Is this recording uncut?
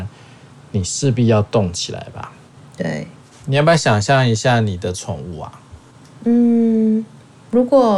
yes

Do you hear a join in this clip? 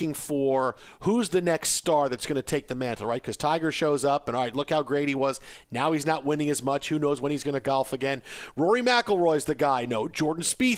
no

